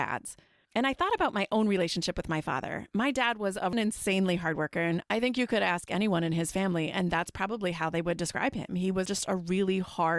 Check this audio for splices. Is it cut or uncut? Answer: cut